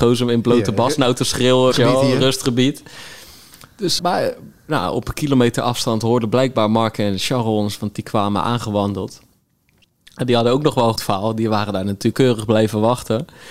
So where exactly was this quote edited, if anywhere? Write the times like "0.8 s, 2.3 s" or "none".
1.7 s, 4.0 s, 11.0 s, 12.1 s